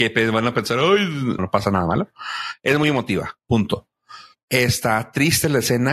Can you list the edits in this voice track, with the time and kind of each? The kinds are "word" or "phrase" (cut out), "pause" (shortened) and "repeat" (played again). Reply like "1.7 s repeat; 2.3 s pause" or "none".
1.4 s word; 4.3 s pause